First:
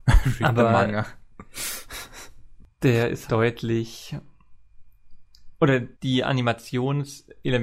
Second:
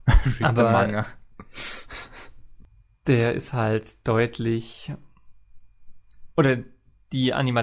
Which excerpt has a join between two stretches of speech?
first; 3 cuts; at 2.7 s, 3.3 s, 5.9 s

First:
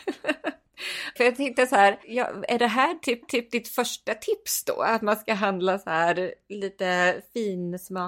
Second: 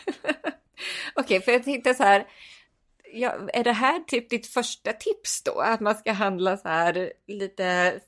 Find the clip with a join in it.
first; 3 cuts; at 1.2 s, 2.0 s, 3.2 s

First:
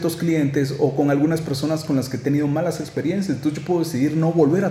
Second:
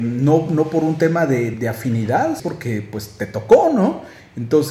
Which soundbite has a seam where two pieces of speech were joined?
second; 2 cuts; at 1.5 s, 2.4 s

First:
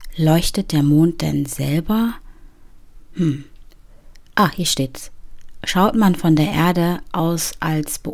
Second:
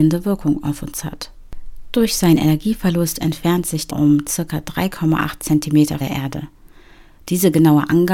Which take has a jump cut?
second; 2 cuts; at 3.9 s, 6.0 s

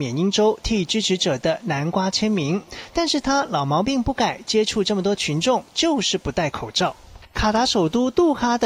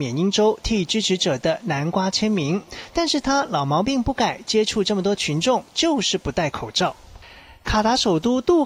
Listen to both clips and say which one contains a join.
first; 1 cut; at 7.2 s

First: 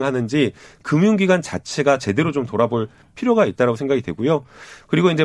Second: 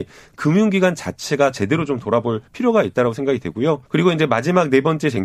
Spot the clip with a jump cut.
second; 2 cuts; at 2.5 s, 3.9 s

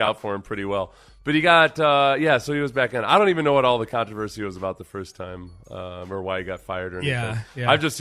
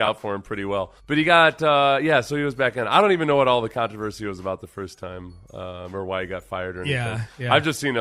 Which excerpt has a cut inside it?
second; 1 cut; at 1.0 s

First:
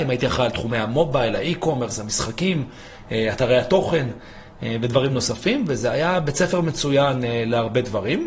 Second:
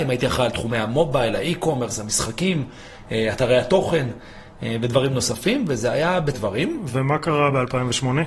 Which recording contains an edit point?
second; 1 cut; at 6.3 s

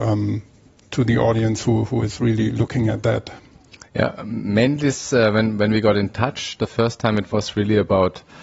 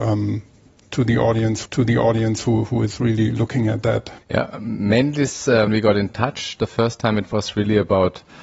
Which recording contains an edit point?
second; 3 cuts; at 1.6 s, 4.2 s, 5.7 s

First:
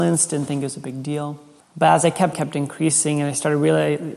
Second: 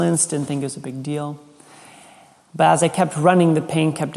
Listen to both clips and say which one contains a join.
first; 2 cuts; at 1.6 s, 2.3 s

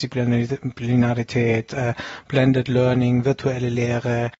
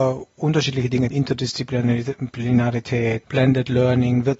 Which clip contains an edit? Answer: second; 2 cuts; at 1.1 s, 3.2 s

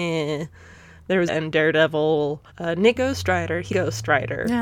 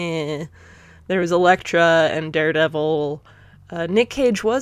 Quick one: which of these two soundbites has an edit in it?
first; 4 cuts; at 1.3 s, 2.5 s, 3.0 s, 3.7 s

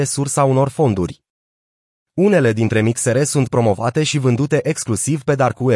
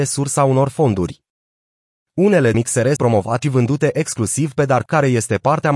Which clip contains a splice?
second; 4 cuts; at 2.5 s, 3.0 s, 3.4 s, 4.9 s

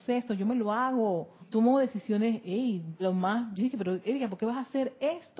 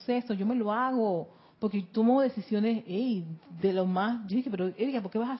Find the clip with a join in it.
first; 2 cuts; at 1.4 s, 3.0 s

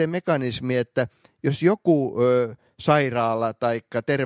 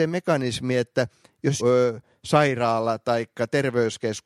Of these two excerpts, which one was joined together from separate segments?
second; 1 cut; at 1.6 s

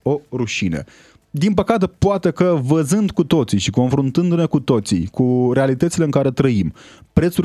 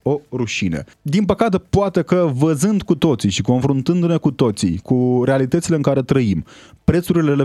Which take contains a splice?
second; 1 cut; at 0.9 s

